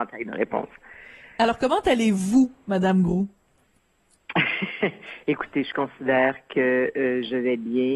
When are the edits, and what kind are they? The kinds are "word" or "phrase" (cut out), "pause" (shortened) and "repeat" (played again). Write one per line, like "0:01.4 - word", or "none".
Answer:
none